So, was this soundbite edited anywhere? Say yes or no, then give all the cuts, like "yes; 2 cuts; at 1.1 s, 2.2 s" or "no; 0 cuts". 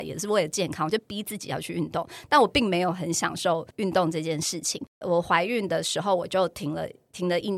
yes; 2 cuts; at 3.7 s, 4.9 s